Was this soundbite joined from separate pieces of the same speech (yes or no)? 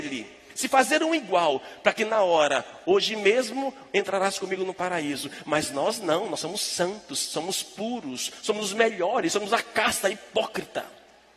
no